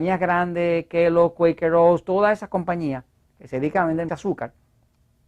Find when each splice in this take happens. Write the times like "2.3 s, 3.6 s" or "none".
4.1 s